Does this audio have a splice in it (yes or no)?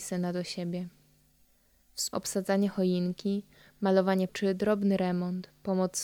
yes